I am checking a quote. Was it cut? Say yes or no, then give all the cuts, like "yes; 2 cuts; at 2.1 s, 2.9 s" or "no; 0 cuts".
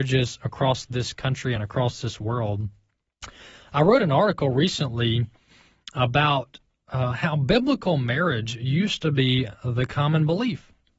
no; 0 cuts